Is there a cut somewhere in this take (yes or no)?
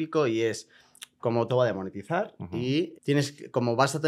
yes